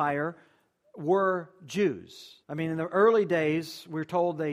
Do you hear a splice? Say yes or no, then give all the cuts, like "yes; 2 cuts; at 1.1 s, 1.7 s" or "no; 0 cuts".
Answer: yes; 1 cut; at 2.4 s